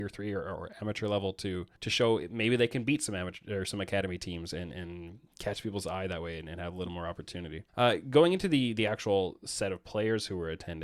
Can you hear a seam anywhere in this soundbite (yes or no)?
yes